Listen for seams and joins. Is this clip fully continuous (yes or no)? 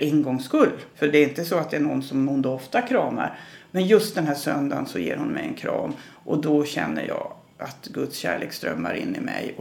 no